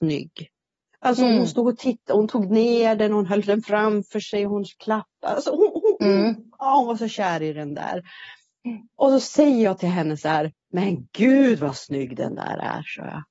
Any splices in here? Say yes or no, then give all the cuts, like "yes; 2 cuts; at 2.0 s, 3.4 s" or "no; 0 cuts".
no; 0 cuts